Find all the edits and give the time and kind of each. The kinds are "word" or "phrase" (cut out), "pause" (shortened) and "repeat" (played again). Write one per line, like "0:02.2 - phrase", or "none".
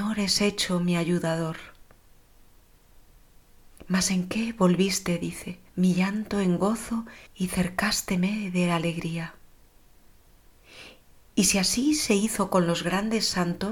0:05.7 - pause
0:07.3 - pause